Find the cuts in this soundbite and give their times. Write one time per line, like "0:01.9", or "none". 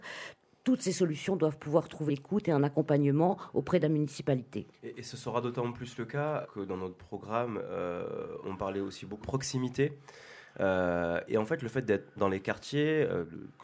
0:02.1
0:04.8
0:06.4
0:08.4
0:09.2
0:11.3
0:12.2